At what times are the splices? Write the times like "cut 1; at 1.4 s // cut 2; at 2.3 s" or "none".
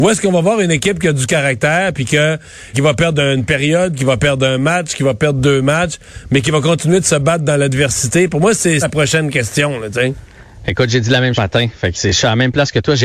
cut 1; at 2.7 s // cut 2; at 8.8 s // cut 3; at 11.3 s // cut 4; at 11.9 s